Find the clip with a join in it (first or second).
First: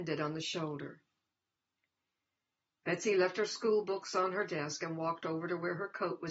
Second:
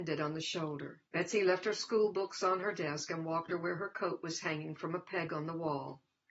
second